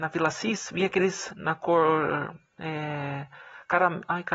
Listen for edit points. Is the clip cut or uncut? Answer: cut